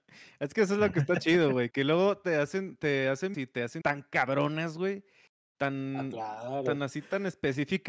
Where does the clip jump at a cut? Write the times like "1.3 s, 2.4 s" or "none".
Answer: 3.3 s, 3.8 s